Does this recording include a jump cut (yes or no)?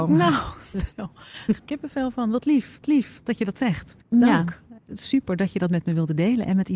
yes